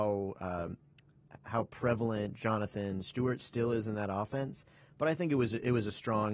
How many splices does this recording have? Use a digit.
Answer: 0